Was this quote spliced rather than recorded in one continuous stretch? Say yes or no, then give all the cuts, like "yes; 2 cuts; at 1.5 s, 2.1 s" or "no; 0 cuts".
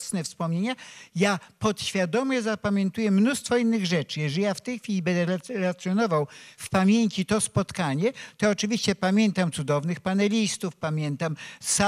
no; 0 cuts